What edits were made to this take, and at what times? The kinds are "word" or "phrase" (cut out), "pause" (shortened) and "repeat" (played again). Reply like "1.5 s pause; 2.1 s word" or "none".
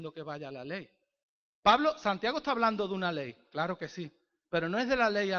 none